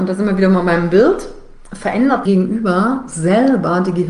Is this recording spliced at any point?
yes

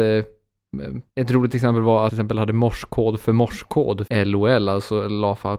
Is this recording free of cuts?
no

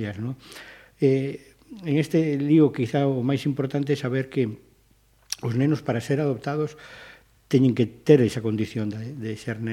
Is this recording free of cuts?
yes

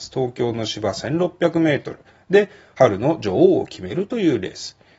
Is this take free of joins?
yes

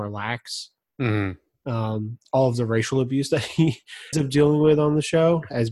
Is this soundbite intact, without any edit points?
no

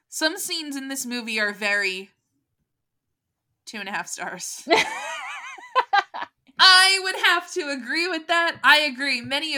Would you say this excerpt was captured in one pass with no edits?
yes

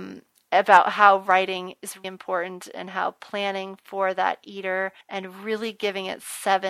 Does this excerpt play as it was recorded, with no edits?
no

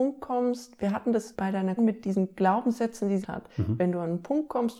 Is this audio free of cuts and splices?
no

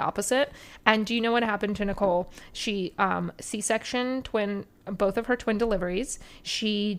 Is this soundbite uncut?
yes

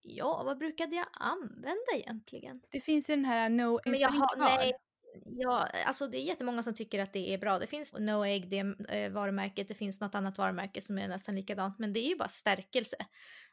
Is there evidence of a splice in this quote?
yes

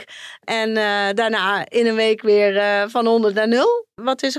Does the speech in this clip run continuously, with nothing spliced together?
yes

